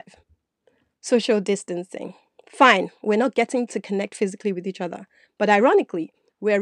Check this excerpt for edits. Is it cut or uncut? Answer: uncut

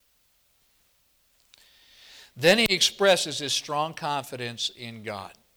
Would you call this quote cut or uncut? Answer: uncut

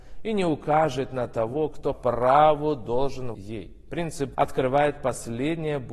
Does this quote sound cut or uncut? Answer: cut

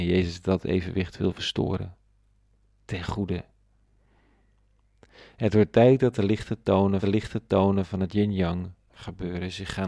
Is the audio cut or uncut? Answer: cut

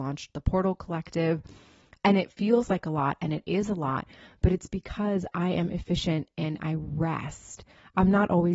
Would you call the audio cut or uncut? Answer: uncut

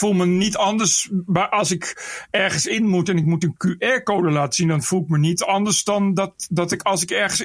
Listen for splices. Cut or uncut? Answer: uncut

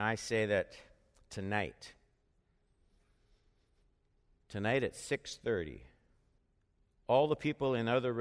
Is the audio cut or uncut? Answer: cut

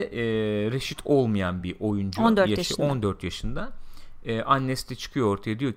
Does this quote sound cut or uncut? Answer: uncut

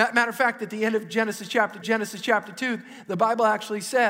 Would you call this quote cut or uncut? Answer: cut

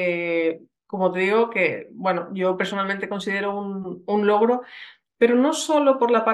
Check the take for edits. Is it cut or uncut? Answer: uncut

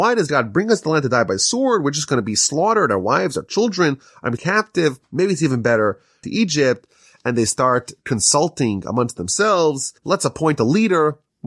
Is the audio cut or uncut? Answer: cut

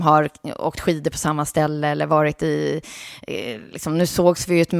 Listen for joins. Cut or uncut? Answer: uncut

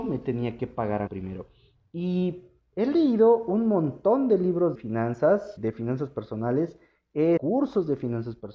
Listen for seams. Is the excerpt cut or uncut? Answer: cut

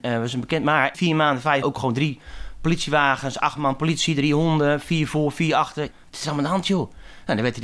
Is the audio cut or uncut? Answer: cut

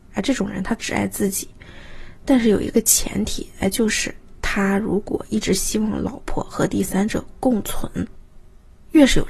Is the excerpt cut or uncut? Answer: uncut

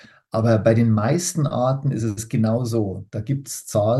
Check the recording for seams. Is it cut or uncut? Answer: uncut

